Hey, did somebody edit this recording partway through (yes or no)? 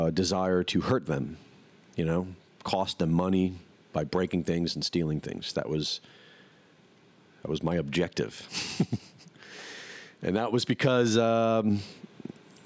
no